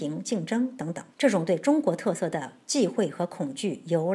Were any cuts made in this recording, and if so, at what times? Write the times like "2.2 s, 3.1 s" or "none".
1.1 s